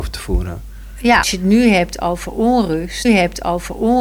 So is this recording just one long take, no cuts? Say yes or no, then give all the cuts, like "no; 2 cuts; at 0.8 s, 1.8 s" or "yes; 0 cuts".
no; 2 cuts; at 1.2 s, 3.0 s